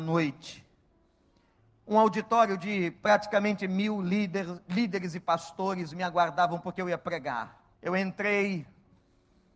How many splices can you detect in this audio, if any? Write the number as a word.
one